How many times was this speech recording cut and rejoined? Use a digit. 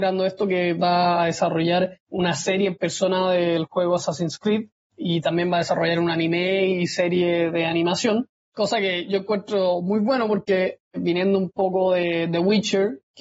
0